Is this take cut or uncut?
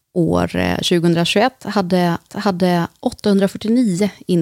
cut